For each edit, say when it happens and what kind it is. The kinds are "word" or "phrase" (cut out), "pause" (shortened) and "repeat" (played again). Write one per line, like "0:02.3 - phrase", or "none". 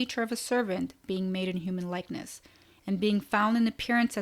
none